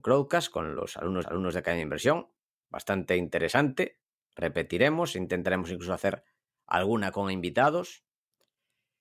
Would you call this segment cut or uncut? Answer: cut